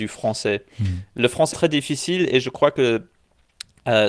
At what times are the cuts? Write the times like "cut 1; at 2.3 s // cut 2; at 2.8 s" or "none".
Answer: cut 1; at 1.5 s